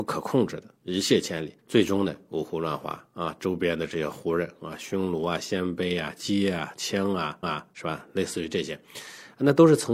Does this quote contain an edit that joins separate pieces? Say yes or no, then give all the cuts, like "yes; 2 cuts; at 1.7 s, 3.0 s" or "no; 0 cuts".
yes; 2 cuts; at 1.6 s, 7.4 s